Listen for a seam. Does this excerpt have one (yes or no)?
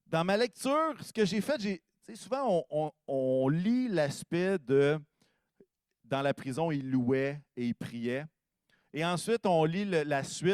no